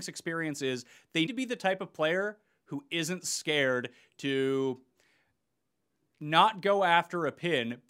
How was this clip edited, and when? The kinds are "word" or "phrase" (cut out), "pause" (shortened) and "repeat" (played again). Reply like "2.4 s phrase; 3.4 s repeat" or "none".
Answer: 1.3 s word